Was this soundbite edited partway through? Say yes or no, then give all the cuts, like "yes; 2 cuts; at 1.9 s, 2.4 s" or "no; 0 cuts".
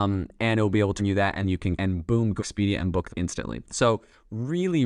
yes; 5 cuts; at 1.0 s, 1.4 s, 1.8 s, 2.4 s, 3.1 s